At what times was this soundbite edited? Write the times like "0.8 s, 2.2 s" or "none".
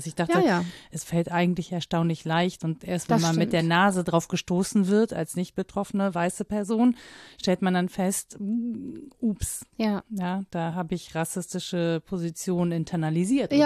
none